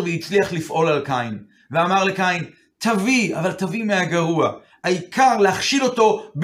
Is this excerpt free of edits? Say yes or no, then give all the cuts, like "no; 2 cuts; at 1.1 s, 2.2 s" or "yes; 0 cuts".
yes; 0 cuts